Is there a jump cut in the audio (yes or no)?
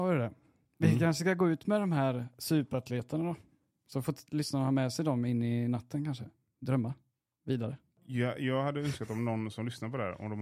no